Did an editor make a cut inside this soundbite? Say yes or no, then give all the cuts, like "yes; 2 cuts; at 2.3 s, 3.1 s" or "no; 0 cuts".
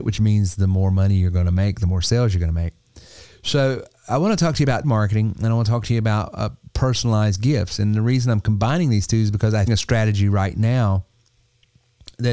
yes; 2 cuts; at 4.8 s, 9.7 s